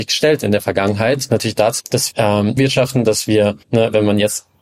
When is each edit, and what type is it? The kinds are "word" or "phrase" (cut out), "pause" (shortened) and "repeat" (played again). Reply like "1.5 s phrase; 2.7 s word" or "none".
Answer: 1.3 s phrase; 1.8 s word; 2.1 s word; 2.6 s word; 3.6 s pause